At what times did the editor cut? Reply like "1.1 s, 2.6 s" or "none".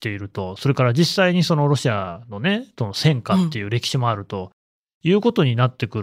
none